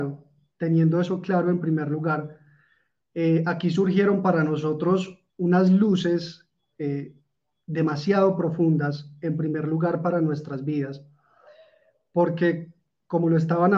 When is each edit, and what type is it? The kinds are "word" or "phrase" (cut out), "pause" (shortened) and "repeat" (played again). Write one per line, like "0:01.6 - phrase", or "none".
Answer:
0:05.3 - pause